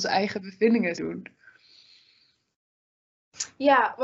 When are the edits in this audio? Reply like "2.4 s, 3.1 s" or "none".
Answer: 0.9 s